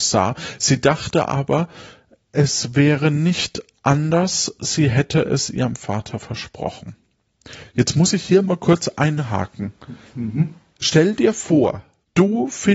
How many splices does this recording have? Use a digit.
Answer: 0